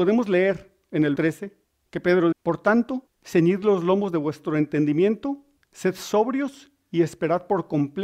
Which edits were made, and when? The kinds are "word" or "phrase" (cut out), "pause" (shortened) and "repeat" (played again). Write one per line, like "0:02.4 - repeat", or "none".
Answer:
0:01.2 - word
0:01.6 - pause
0:02.3 - word
0:03.1 - pause
0:05.6 - pause